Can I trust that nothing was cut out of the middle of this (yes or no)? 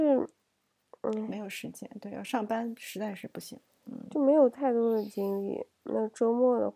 yes